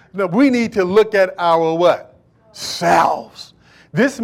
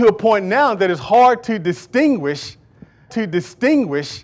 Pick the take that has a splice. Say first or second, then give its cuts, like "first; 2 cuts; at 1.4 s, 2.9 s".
second; 1 cut; at 3.1 s